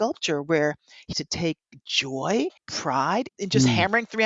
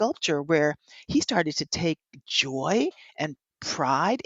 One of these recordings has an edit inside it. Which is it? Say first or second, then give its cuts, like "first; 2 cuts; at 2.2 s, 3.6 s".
first; 3 cuts; at 1.1 s, 2.6 s, 3.3 s